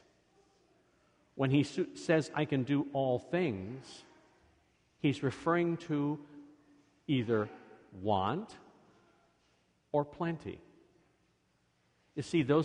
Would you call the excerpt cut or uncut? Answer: uncut